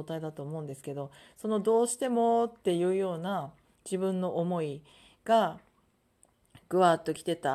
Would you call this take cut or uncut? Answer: uncut